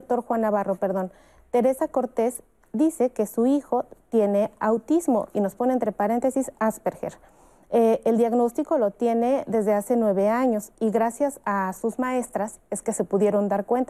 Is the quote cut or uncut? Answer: uncut